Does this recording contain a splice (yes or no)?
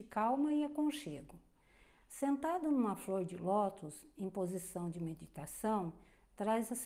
no